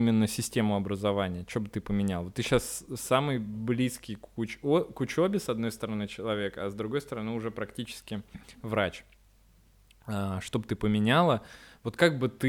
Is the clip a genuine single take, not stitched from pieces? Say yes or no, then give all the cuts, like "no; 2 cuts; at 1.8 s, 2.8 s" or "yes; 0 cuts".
yes; 0 cuts